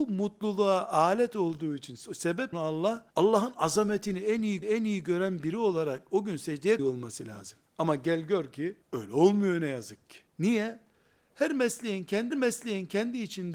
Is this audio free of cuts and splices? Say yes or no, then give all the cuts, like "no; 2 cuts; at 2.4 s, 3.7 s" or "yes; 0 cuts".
no; 8 cuts; at 2.5 s, 3.1 s, 4.6 s, 6.8 s, 7.7 s, 8.8 s, 10.3 s, 12.3 s